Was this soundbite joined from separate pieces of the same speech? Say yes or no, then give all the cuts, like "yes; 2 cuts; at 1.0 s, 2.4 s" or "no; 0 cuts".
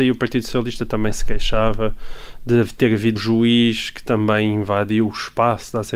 yes; 1 cut; at 3.2 s